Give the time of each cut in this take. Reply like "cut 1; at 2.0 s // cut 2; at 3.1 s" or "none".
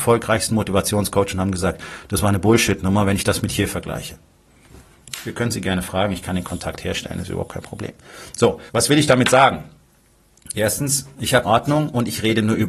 cut 1; at 8.7 s // cut 2; at 11.4 s

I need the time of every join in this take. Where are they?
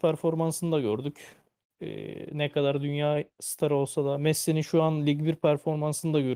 none

